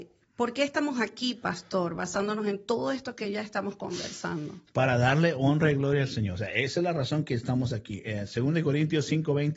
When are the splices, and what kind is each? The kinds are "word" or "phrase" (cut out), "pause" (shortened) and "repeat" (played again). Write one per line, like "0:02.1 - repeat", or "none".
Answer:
none